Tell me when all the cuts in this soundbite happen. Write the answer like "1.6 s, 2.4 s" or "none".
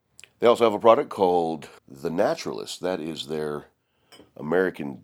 1.8 s